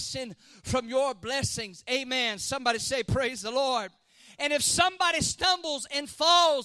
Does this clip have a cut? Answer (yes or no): no